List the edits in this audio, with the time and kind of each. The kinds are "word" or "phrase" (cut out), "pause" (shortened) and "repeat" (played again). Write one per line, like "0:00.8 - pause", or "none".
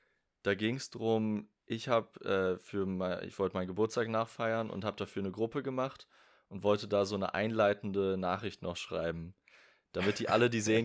none